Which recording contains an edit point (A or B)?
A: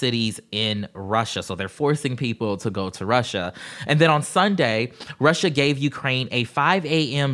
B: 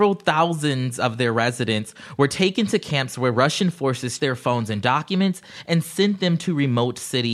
B